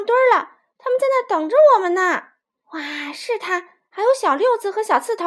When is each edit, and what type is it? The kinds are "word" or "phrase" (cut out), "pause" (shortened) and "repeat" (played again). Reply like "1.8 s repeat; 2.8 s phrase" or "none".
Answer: 2.4 s pause